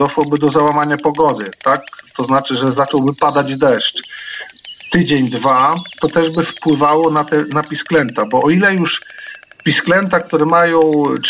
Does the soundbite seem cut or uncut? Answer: uncut